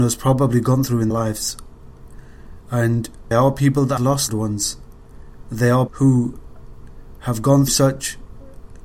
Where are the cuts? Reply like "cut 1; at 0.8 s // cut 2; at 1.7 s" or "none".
cut 1; at 1.1 s // cut 2; at 3.3 s // cut 3; at 4.0 s // cut 4; at 4.3 s // cut 5; at 5.9 s // cut 6; at 7.7 s

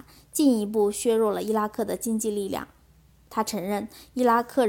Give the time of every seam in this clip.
none

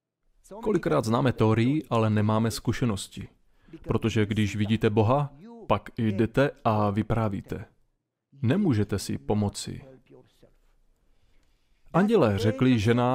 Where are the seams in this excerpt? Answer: none

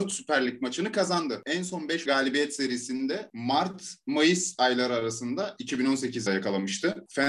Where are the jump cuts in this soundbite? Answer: cut 1; at 2.1 s // cut 2; at 6.3 s

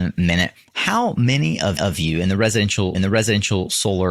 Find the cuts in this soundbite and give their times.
cut 1; at 1.8 s // cut 2; at 2.9 s

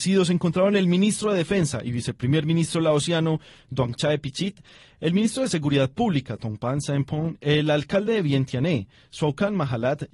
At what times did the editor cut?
none

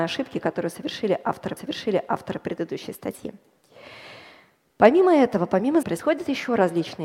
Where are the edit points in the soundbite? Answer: cut 1; at 1.6 s // cut 2; at 5.8 s

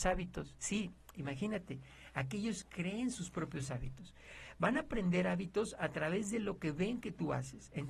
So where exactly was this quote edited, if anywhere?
cut 1; at 1.1 s

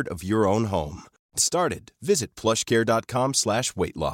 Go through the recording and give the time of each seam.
cut 1; at 1.4 s

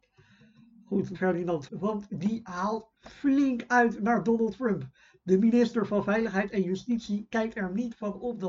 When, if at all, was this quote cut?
cut 1; at 1.1 s // cut 2; at 1.7 s

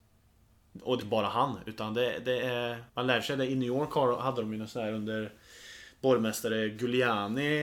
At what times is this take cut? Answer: cut 1; at 1.0 s // cut 2; at 2.9 s

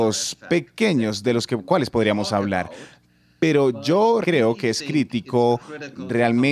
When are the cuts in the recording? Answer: cut 1; at 4.2 s

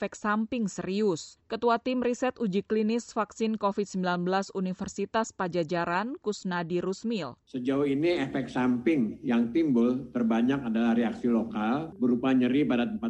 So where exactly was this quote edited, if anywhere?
cut 1; at 7.4 s

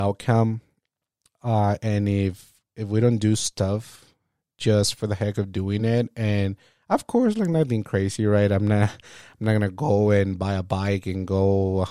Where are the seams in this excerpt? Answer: none

